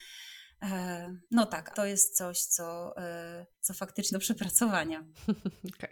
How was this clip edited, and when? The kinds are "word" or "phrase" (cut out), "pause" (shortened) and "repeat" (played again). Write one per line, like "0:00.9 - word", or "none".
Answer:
0:01.2 - pause
0:01.7 - word
0:03.5 - pause
0:04.1 - word